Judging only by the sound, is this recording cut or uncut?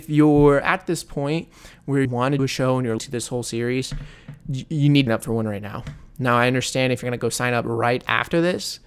cut